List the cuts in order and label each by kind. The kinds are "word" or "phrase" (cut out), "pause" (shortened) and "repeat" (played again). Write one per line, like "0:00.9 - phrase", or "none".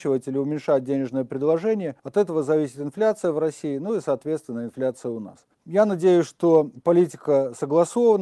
0:02.0 - pause
0:05.5 - pause